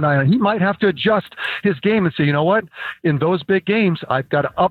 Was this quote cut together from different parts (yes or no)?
no